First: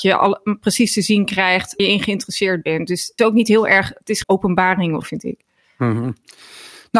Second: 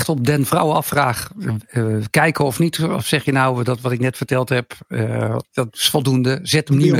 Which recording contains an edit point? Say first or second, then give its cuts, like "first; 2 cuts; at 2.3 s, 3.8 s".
first; 4 cuts; at 1.8 s, 3.2 s, 4.2 s, 5.0 s